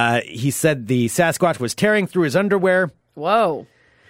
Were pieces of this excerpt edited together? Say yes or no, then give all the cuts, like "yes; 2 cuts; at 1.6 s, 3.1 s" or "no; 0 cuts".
yes; 1 cut; at 3.0 s